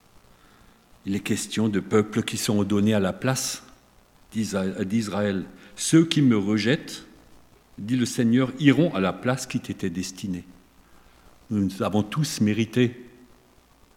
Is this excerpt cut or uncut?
uncut